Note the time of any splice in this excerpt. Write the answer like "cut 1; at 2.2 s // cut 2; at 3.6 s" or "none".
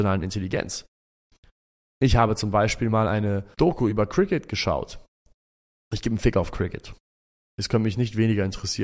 none